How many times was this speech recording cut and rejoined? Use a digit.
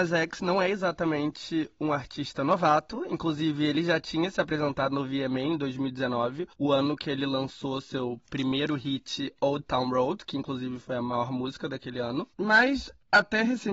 2